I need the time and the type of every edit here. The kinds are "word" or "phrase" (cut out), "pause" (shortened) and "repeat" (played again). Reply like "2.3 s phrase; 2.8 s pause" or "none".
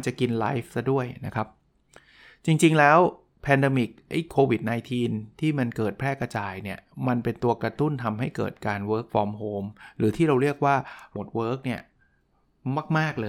11.2 s phrase